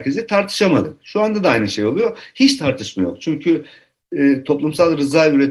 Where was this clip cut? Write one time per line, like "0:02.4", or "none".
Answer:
none

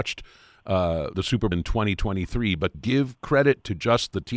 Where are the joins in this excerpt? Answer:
0:01.1
0:01.5
0:02.7

